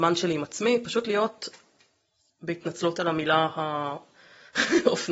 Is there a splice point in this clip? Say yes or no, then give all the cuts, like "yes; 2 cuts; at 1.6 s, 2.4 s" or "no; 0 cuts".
no; 0 cuts